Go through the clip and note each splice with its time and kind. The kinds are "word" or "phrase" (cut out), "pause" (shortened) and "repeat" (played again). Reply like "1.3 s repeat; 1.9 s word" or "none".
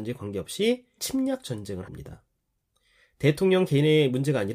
1.0 s word; 1.9 s word